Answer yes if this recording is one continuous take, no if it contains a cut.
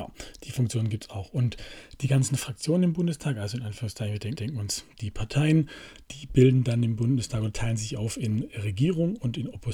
no